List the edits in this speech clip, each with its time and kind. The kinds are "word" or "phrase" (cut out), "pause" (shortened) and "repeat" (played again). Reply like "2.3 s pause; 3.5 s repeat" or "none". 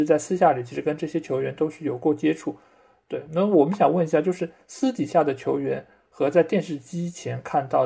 none